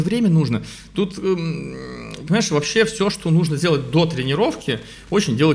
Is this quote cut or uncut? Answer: uncut